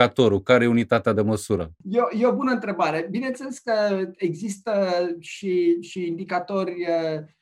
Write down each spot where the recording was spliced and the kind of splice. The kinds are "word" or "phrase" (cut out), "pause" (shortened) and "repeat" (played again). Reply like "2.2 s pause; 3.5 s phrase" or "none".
1.8 s pause